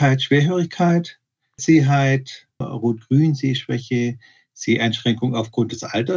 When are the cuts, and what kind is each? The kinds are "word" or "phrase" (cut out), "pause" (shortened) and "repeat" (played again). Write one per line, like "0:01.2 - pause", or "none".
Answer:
0:01.6 - word
0:02.6 - word